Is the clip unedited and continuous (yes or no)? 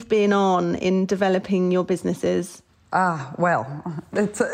yes